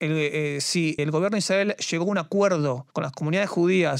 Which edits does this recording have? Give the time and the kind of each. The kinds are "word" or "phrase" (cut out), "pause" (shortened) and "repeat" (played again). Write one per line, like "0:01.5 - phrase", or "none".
0:01.0 - word
0:02.9 - pause